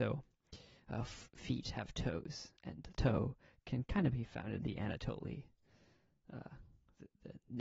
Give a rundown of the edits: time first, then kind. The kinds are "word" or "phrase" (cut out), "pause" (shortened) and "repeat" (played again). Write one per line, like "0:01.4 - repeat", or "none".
0:02.9 - phrase